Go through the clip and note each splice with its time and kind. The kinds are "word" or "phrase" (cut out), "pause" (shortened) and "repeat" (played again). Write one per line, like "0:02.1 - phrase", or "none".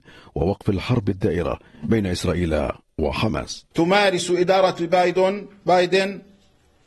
0:03.7 - pause